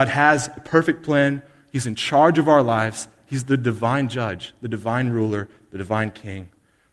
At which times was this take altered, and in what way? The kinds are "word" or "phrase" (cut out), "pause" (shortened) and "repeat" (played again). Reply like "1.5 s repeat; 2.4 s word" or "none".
none